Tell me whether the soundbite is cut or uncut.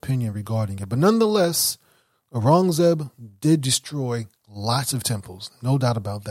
cut